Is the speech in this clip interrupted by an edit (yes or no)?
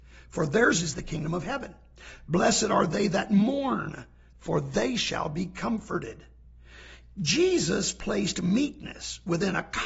no